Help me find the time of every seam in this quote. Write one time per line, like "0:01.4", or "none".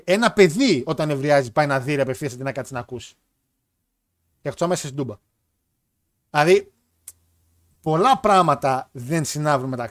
none